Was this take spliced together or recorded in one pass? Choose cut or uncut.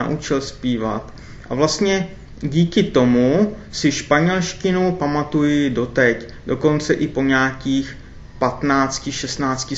uncut